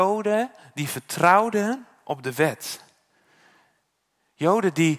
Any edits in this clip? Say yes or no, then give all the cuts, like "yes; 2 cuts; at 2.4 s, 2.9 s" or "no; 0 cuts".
no; 0 cuts